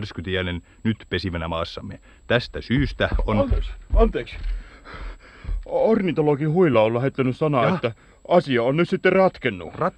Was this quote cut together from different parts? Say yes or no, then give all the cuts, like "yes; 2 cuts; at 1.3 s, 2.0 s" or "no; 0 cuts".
no; 0 cuts